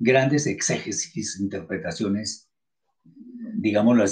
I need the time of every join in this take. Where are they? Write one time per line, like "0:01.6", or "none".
none